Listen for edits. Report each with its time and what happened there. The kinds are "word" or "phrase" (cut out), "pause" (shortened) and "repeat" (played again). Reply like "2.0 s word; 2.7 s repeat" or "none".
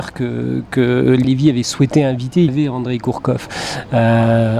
1.2 s word; 2.5 s word